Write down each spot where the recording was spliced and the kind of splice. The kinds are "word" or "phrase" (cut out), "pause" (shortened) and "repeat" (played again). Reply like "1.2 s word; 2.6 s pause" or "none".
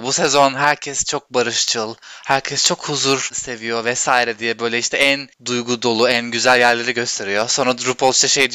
5.3 s pause

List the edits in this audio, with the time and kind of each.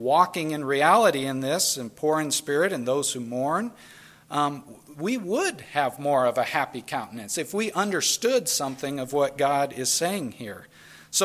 none

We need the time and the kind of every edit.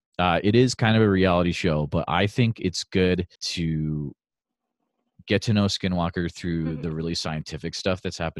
3.4 s pause

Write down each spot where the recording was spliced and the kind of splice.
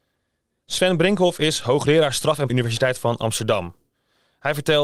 2.5 s phrase

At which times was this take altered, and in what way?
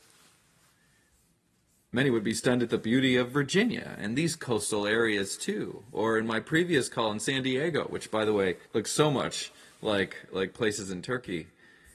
8.6 s pause

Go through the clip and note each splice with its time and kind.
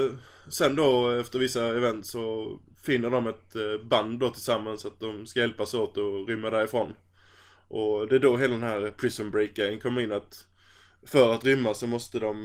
none

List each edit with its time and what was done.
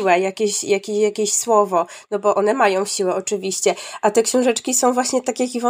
none

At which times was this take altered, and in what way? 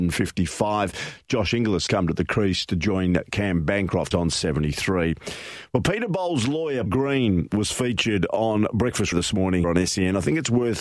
1.9 s word; 4.1 s word; 6.9 s word; 9.1 s word; 9.6 s word

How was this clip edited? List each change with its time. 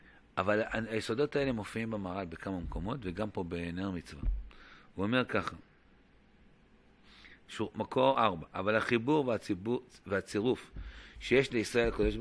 none

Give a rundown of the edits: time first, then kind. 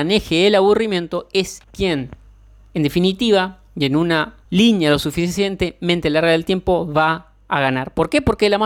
1.6 s pause; 4.4 s pause

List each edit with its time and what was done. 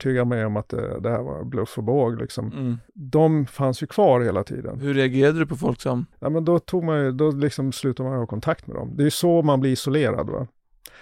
2.9 s pause; 6.1 s pause

